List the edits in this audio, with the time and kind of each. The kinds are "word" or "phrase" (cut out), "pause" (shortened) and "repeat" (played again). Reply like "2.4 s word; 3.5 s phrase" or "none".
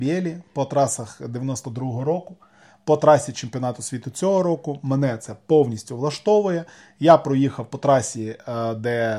none